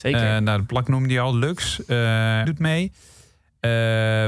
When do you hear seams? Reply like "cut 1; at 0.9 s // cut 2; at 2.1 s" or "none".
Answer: cut 1; at 2.4 s